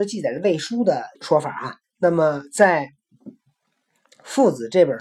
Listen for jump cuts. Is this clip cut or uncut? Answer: cut